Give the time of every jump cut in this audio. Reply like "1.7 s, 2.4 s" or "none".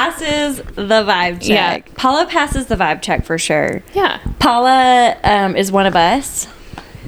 none